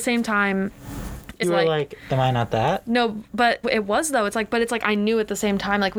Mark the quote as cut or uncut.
cut